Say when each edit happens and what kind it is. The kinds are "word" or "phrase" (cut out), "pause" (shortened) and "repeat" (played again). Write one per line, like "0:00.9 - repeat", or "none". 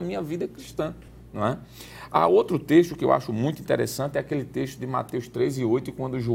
none